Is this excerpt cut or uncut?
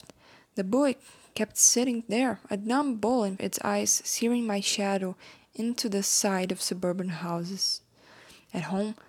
cut